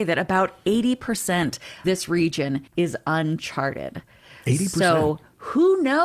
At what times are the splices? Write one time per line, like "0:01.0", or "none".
0:01.8
0:02.7